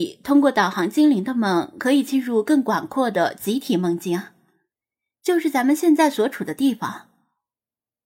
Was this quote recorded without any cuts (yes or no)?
yes